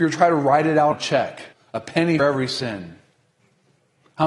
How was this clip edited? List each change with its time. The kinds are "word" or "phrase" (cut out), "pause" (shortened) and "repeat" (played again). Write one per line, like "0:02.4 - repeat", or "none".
0:00.9 - word
0:01.5 - pause
0:02.2 - word